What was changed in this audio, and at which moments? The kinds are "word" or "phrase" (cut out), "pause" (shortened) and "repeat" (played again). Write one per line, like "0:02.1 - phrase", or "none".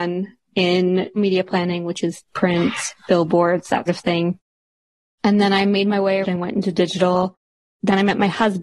0:01.2 - word
0:02.2 - word
0:03.9 - word
0:06.2 - word